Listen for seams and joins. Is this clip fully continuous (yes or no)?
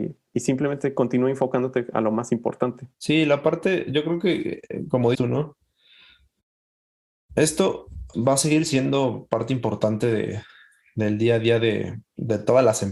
no